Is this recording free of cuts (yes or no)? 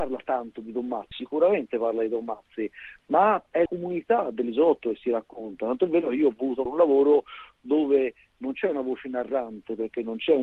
no